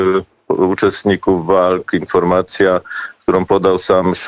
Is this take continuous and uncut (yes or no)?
yes